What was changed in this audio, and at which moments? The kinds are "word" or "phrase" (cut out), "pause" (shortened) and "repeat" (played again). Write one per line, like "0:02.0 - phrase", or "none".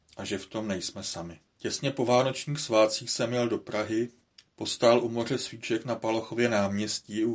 0:01.5 - pause
0:04.5 - pause